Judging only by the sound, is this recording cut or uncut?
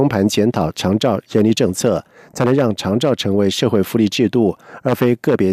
uncut